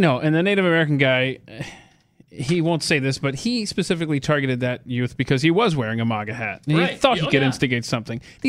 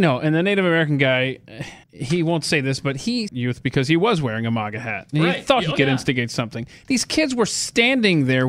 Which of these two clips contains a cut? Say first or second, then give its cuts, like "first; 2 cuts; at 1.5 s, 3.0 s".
second; 2 cuts; at 1.8 s, 3.3 s